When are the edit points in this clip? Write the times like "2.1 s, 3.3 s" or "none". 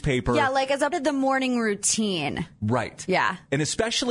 0.9 s